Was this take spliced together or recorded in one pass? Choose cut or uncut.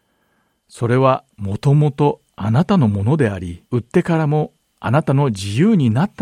cut